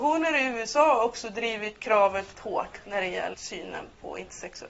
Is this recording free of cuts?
no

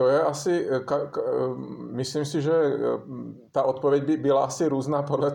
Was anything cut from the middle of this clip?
yes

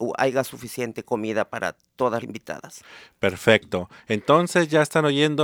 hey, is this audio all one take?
no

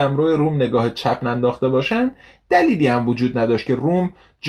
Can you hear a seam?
no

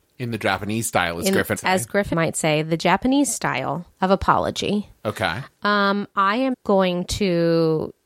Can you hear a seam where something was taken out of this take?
yes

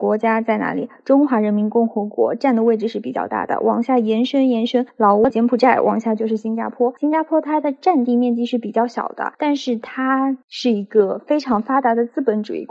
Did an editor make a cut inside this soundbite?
yes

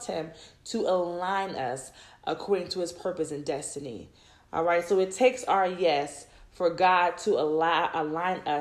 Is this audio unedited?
yes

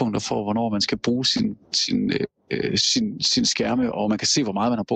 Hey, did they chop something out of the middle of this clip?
yes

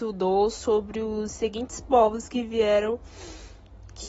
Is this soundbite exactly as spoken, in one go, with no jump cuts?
yes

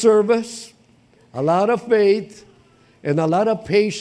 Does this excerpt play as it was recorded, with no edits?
yes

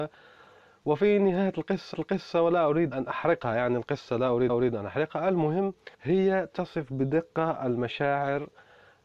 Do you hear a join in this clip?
yes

